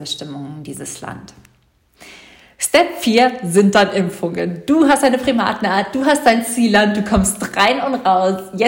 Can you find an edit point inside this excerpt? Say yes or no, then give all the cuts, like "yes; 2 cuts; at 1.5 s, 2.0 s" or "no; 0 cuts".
no; 0 cuts